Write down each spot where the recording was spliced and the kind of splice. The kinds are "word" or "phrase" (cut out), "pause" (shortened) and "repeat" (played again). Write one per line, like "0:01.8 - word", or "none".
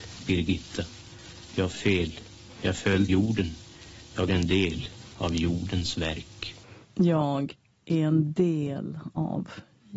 0:01.7 - word
0:03.1 - word
0:04.3 - word
0:06.8 - pause